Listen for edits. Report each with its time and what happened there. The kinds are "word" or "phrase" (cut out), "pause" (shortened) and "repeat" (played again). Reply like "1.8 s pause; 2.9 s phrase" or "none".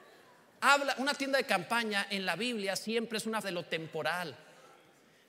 3.4 s word